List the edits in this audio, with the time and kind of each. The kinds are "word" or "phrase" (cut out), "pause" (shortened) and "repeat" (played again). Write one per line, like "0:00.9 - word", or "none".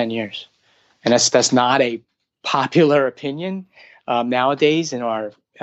none